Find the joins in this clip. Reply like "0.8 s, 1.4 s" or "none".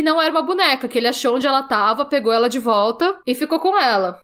none